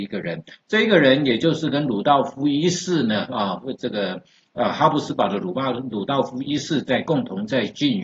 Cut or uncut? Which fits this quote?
uncut